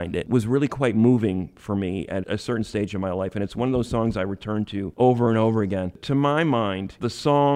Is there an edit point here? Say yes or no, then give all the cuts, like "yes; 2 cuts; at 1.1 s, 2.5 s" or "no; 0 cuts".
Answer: no; 0 cuts